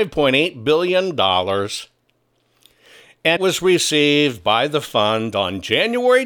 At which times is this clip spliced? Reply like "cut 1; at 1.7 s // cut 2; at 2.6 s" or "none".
cut 1; at 3.4 s

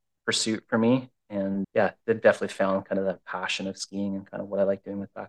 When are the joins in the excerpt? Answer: cut 1; at 1.6 s

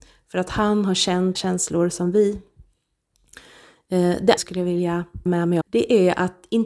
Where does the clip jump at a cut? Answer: cut 1; at 1.3 s // cut 2; at 4.4 s // cut 3; at 5.3 s // cut 4; at 5.6 s

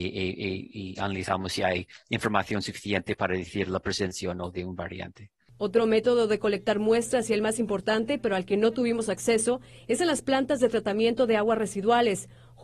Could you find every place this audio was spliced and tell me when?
none

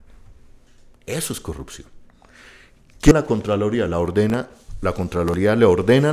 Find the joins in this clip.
cut 1; at 3.1 s

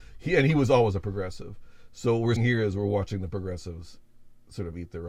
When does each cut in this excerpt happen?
cut 1; at 2.4 s

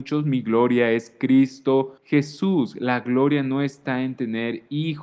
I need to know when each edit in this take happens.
cut 1; at 2.0 s

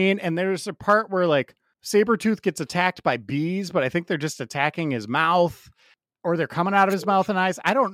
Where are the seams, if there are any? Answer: none

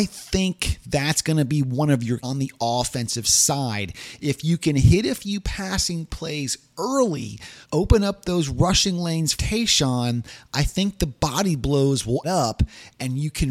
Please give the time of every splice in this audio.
cut 1; at 2.2 s // cut 2; at 7.6 s // cut 3; at 9.4 s // cut 4; at 12.2 s

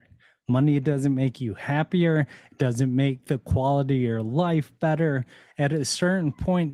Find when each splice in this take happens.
none

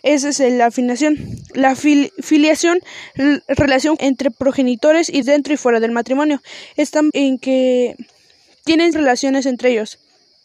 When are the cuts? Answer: cut 1; at 4.0 s // cut 2; at 5.2 s // cut 3; at 7.1 s // cut 4; at 8.9 s

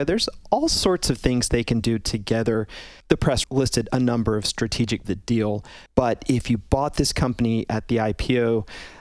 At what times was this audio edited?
cut 1; at 3.0 s // cut 2; at 3.4 s // cut 3; at 5.0 s // cut 4; at 5.9 s

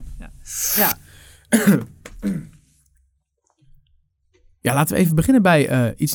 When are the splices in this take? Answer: none

